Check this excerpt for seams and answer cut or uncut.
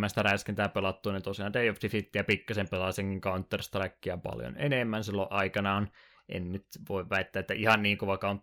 uncut